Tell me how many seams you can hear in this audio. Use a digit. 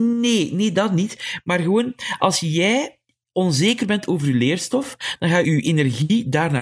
1